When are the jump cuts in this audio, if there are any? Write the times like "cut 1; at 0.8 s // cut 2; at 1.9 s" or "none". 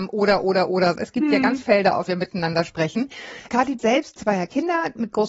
cut 1; at 0.9 s // cut 2; at 1.6 s // cut 3; at 2.1 s // cut 4; at 3.5 s // cut 5; at 3.8 s // cut 6; at 4.2 s